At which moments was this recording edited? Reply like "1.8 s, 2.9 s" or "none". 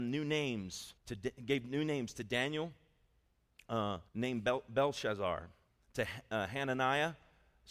1.0 s, 4.1 s, 5.7 s